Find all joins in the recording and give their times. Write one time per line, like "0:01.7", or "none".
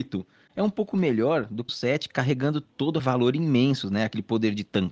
0:01.7
0:03.0